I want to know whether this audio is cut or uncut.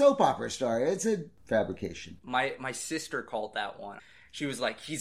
uncut